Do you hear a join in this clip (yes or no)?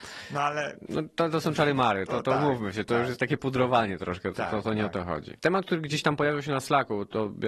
yes